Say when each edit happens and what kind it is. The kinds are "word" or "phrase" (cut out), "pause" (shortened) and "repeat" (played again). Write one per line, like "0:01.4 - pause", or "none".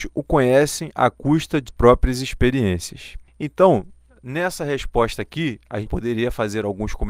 0:01.7 - word
0:03.3 - pause
0:05.9 - word